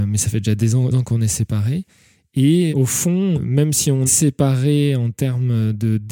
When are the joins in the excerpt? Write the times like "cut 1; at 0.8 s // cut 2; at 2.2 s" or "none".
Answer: cut 1; at 0.9 s // cut 2; at 2.7 s // cut 3; at 3.3 s // cut 4; at 4.1 s